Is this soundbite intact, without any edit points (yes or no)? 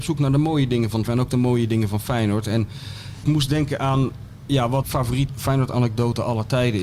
no